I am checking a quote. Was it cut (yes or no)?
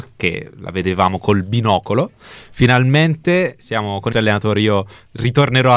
yes